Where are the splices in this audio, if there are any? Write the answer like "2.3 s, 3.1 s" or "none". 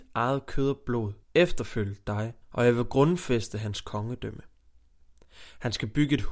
1.2 s, 2.4 s